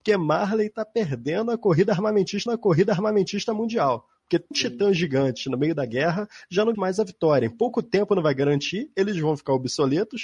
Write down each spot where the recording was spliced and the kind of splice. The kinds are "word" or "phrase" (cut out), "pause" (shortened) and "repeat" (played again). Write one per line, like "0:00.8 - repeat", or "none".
0:02.5 - repeat
0:04.5 - word
0:06.7 - word